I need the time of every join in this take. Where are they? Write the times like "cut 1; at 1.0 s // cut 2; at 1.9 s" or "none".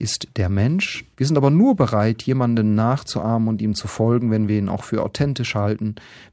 cut 1; at 1.1 s